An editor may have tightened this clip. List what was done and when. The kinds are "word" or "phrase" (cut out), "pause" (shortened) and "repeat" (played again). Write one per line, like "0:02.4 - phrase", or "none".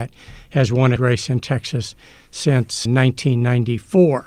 0:01.0 - word
0:02.9 - word